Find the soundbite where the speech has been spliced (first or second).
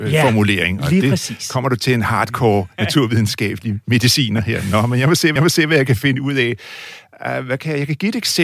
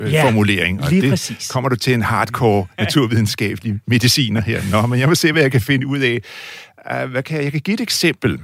first